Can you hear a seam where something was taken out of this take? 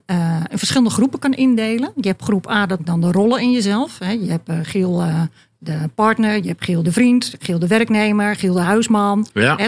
yes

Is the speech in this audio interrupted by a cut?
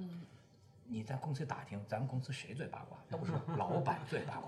no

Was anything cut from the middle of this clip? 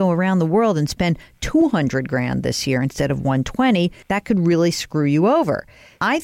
yes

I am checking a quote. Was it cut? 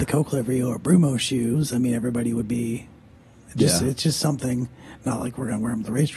no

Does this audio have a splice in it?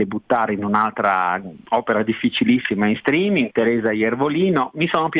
yes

